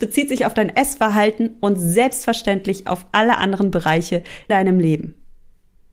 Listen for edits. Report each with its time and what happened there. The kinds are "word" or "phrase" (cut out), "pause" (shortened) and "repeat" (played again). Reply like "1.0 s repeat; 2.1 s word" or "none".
4.5 s word